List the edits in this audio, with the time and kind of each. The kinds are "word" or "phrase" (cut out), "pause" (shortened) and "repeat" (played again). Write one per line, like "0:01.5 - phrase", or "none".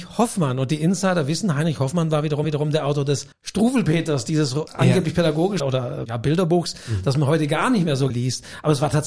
0:02.4 - repeat
0:03.3 - pause
0:05.6 - word
0:06.0 - word
0:08.1 - word